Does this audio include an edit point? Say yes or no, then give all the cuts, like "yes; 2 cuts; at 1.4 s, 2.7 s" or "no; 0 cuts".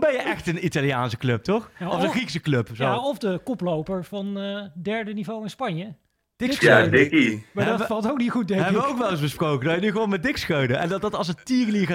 no; 0 cuts